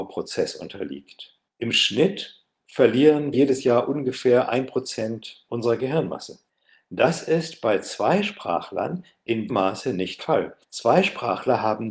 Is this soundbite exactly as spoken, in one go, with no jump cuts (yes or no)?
no